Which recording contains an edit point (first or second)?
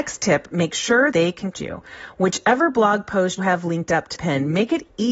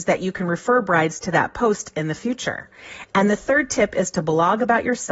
first